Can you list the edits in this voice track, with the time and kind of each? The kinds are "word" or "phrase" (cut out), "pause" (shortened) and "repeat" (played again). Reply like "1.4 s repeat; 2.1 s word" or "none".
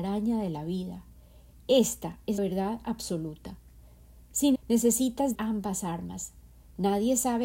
2.4 s word; 4.5 s word; 5.3 s word